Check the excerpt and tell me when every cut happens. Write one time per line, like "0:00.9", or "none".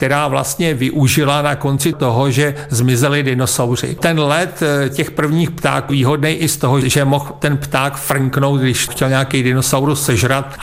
0:01.9
0:05.9
0:06.8
0:08.9